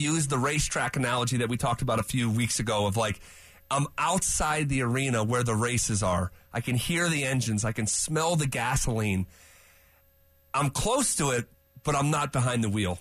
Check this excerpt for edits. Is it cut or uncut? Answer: uncut